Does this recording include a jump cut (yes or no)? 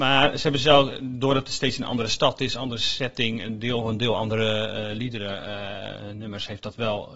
no